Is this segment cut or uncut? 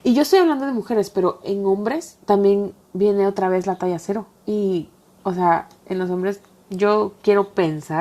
cut